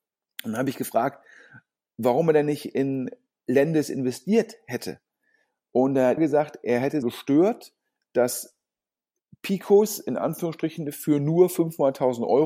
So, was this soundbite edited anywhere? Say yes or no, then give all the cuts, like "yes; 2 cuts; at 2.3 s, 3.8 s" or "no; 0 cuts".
yes; 2 cuts; at 6.2 s, 7.0 s